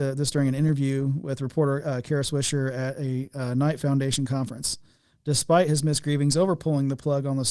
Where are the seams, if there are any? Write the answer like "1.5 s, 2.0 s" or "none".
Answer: none

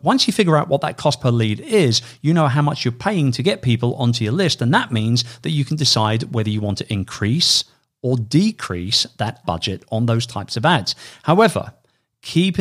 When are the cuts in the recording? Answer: 9.4 s

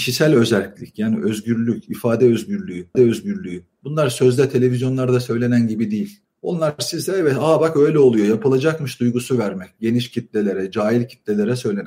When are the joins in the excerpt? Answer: 2.9 s, 6.2 s

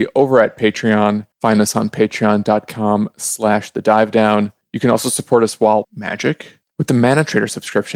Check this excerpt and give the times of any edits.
1.3 s, 5.8 s

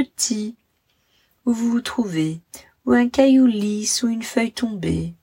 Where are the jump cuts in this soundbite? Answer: none

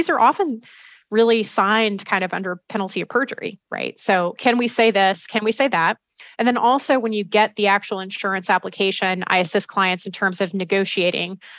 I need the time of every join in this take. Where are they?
none

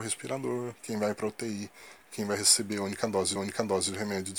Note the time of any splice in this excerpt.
3.4 s

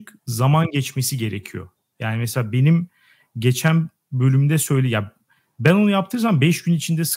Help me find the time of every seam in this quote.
none

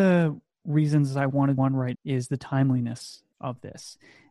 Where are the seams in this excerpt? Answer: 1.6 s, 1.9 s

